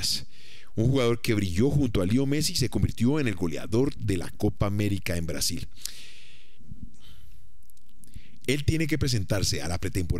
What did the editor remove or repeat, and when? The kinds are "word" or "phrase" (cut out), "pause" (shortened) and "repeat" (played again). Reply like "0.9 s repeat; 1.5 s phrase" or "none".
none